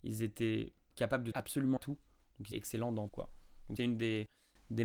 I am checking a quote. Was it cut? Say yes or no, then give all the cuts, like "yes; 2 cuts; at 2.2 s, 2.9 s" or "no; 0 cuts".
yes; 5 cuts; at 1.3 s, 1.8 s, 2.5 s, 3.1 s, 3.8 s